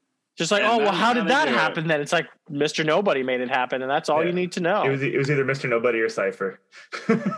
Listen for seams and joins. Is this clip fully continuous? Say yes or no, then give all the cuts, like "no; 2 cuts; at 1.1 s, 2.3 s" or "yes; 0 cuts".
no; 1 cut; at 2.4 s